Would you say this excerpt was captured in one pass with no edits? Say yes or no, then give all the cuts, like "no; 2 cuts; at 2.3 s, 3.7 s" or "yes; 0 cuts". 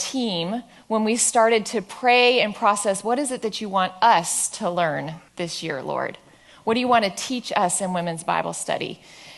no; 1 cut; at 5.3 s